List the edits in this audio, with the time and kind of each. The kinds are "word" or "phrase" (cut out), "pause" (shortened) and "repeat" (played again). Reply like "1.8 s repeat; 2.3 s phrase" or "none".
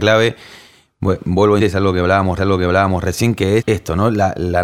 1.6 s word; 2.4 s repeat; 3.6 s word

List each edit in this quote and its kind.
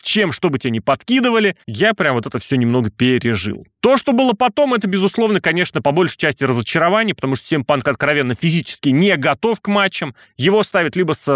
1.6 s pause

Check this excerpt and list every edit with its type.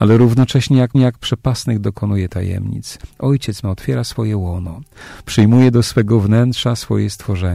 0.9 s repeat; 3.6 s word

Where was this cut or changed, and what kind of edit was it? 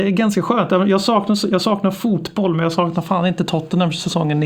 none

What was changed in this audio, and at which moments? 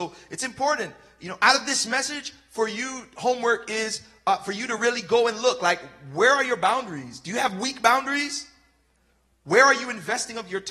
none

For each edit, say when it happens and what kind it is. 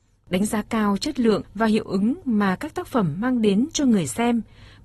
none

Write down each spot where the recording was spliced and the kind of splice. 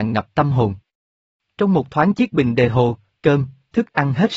none

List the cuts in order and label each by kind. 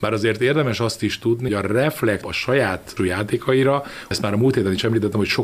1.5 s word; 2.2 s word; 3.0 s word; 4.1 s word

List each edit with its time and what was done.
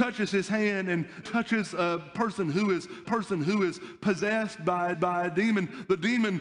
1.2 s word; 3.0 s repeat; 4.9 s repeat

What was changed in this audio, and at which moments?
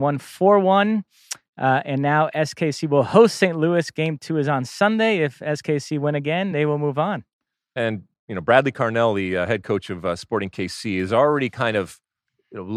none

